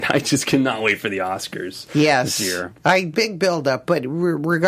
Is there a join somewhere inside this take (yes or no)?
yes